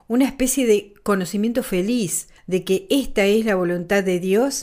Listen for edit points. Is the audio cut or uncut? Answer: cut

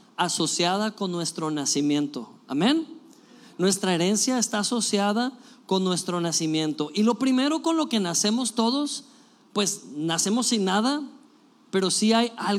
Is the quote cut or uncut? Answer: uncut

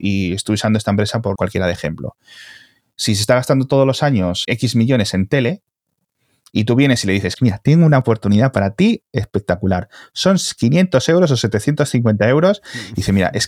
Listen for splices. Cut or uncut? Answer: cut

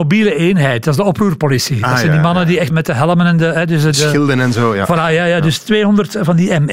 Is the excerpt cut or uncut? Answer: cut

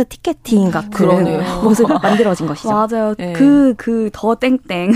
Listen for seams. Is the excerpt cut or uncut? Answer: cut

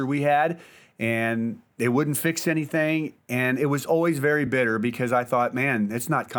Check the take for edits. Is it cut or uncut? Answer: uncut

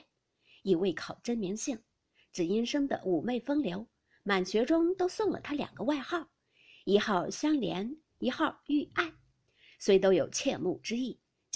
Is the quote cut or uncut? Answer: uncut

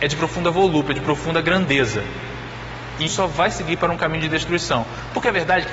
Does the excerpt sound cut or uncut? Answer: cut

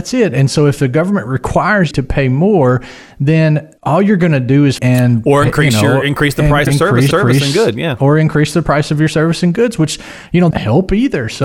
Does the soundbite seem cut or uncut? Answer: cut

